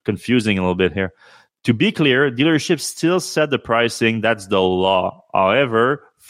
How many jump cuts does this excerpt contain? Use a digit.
0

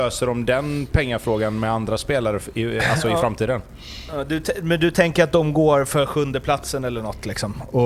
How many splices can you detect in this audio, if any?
0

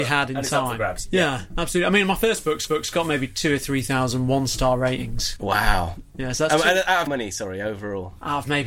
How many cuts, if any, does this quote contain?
2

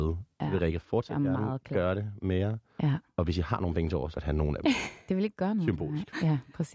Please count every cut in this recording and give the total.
1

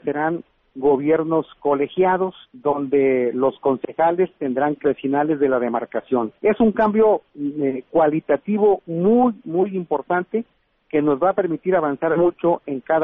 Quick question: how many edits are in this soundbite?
4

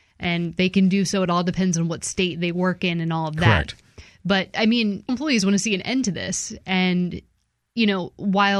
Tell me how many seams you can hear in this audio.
1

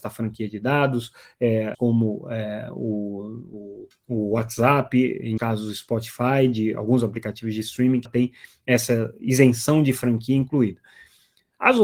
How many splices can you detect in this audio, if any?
4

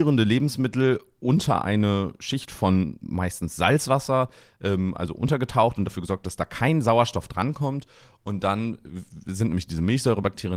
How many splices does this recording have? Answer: 0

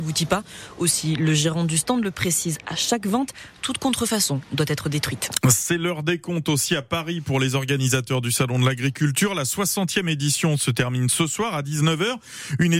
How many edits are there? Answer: 0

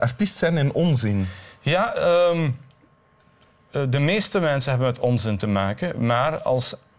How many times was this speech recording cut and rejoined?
0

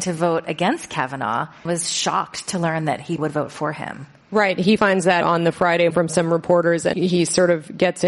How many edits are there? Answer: 6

